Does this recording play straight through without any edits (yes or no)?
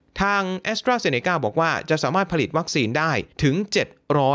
no